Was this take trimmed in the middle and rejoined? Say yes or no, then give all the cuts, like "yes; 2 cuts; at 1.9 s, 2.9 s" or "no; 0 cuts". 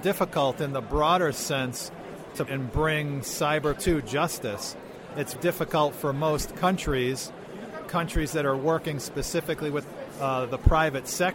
yes; 4 cuts; at 2.5 s, 3.8 s, 5.4 s, 7.8 s